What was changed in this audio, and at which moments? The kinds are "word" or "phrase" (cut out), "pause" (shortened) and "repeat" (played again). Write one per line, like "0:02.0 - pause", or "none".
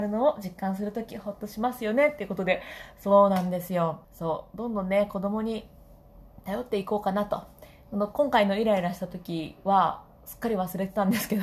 0:04.0 - pause

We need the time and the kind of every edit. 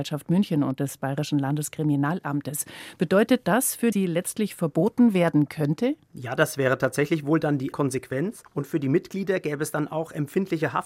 0:03.9 - phrase
0:07.7 - word

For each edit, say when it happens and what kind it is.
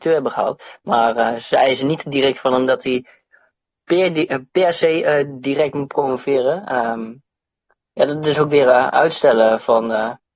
none

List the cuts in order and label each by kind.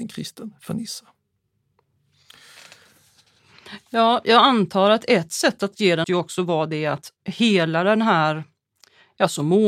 0:06.0 - phrase
0:07.2 - pause

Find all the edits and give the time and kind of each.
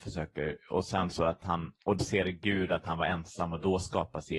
0:02.0 - word

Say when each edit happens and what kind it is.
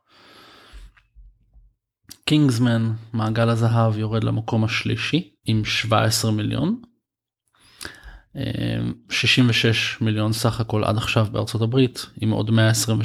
0:05.4 - pause

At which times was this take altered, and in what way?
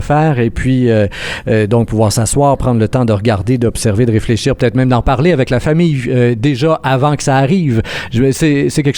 none

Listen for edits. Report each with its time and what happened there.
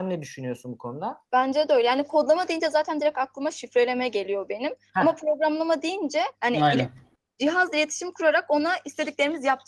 0:01.3 - pause
0:06.3 - pause

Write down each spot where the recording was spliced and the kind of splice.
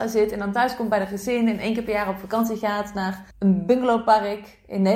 0:03.3 - pause

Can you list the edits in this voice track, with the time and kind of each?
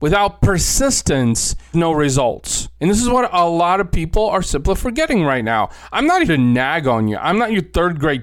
0:01.7 - word
0:02.8 - pause
0:06.3 - word

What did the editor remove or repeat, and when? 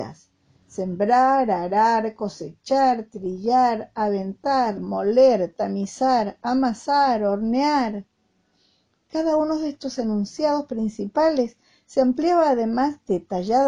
0:04.8 - word

